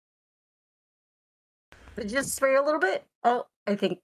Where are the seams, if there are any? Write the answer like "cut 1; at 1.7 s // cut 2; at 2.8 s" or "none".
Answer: none